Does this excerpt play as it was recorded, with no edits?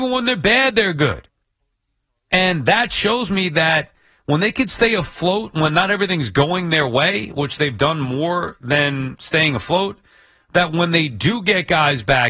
yes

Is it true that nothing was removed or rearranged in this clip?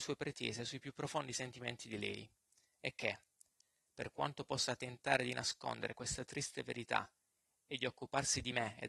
yes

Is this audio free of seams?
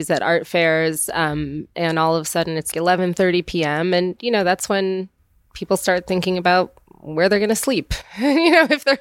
no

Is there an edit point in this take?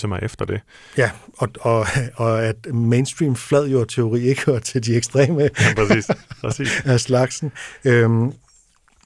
no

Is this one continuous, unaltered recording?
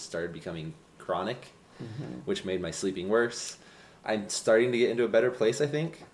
yes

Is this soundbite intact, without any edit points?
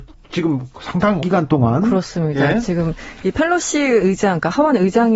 no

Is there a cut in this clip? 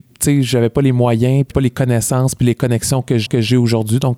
yes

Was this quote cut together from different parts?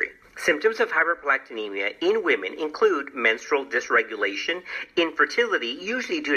no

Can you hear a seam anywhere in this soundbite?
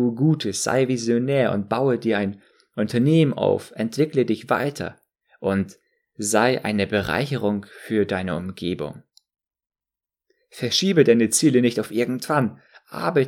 no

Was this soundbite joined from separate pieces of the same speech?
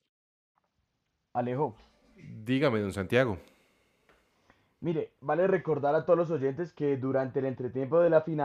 no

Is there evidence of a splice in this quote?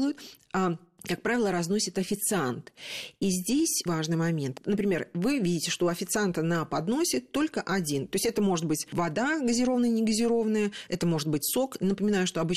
yes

